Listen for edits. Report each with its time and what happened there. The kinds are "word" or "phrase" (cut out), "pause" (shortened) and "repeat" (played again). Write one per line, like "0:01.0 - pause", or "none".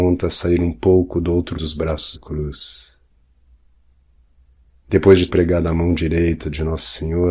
0:01.5 - word
0:02.1 - word
0:05.3 - word